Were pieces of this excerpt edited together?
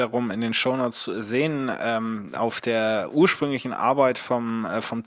no; 0 cuts

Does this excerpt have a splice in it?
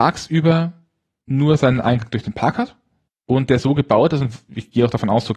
yes; 1 cut; at 3.1 s

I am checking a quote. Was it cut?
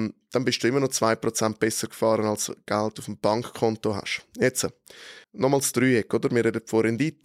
yes; 1 cut; at 5.2 s

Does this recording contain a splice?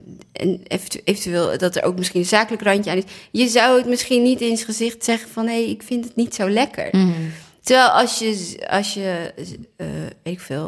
no; 0 cuts

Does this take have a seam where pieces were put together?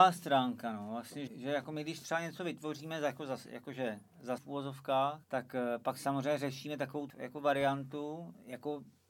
yes; 4 cuts; at 1.3 s, 4.4 s, 5.2 s, 7.1 s

